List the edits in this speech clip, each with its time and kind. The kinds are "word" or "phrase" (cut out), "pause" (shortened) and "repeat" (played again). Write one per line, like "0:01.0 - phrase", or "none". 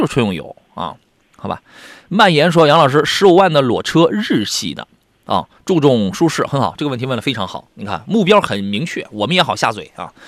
none